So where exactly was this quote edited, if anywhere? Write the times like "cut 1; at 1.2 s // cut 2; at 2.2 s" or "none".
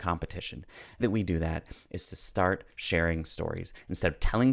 cut 1; at 1.0 s